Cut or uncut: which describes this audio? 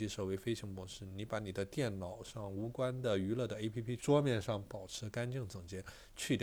cut